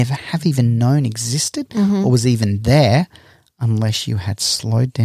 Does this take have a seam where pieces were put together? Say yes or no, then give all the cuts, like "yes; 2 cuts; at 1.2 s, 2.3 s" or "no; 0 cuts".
no; 0 cuts